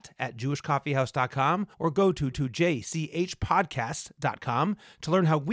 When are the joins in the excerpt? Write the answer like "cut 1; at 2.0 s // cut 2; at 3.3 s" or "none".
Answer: cut 1; at 1.7 s // cut 2; at 2.3 s